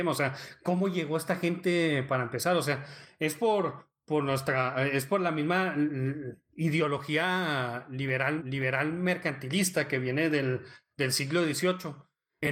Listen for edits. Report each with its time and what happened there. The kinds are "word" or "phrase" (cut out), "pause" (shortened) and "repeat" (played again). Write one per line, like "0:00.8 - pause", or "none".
0:08.4 - repeat